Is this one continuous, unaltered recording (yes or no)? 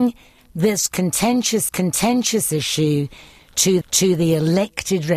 no